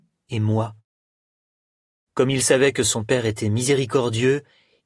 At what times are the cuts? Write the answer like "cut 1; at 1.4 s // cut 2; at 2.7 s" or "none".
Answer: none